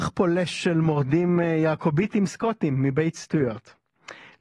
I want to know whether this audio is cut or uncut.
uncut